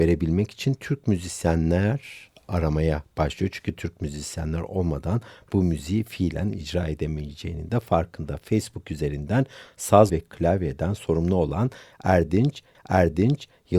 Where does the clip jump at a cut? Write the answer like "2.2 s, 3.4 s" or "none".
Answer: 10.1 s, 12.7 s

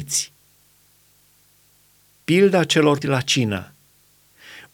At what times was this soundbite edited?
3.0 s

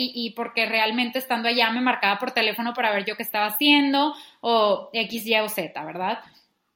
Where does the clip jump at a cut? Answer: none

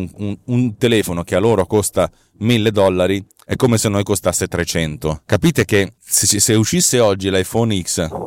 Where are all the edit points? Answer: none

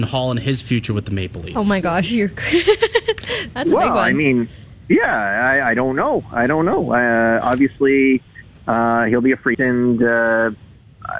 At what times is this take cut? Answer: 9.5 s

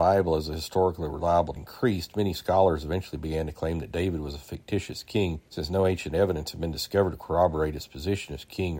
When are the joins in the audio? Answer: 1.6 s, 5.5 s

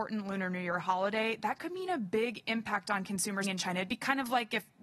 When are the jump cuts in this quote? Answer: 3.4 s

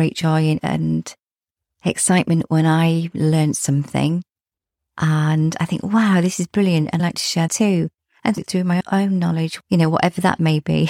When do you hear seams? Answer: 7.0 s, 7.5 s

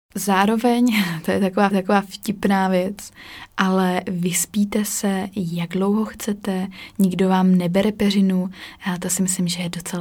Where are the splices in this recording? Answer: 1.7 s

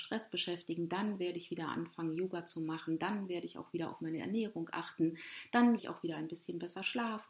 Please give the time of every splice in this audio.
5.8 s

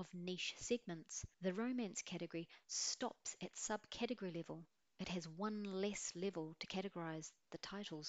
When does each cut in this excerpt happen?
1.3 s, 4.8 s

